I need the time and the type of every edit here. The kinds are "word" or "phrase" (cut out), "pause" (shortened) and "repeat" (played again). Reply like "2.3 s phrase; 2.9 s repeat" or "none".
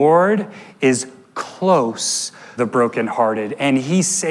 2.6 s word

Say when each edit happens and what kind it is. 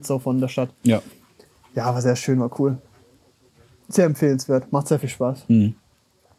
none

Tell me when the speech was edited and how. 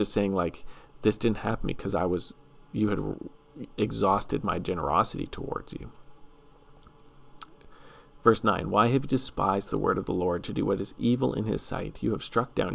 none

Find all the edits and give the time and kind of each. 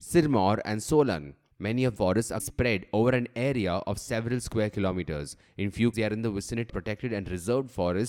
2.0 s word; 2.4 s word; 5.9 s word; 6.7 s word

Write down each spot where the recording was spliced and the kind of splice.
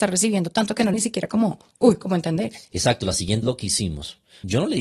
0.9 s word; 3.4 s word

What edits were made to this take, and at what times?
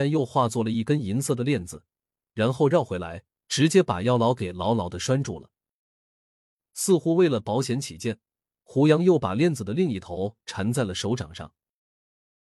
none

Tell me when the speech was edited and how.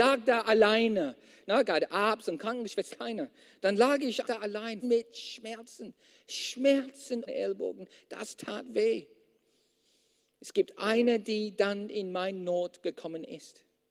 2.9 s phrase; 4.2 s word; 4.8 s word; 7.3 s phrase

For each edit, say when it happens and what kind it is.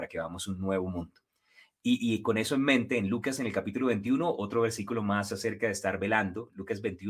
none

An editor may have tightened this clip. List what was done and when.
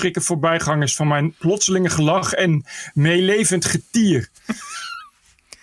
none

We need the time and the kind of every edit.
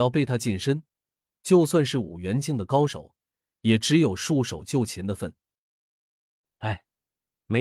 none

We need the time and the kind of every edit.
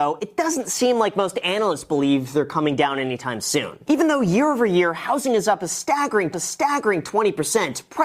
6.3 s repeat

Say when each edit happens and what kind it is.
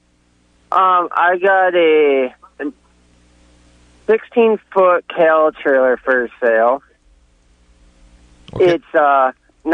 none

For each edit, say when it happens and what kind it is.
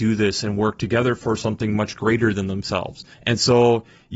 3.1 s pause

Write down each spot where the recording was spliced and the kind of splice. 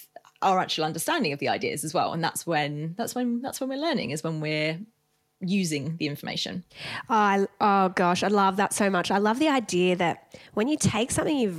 none

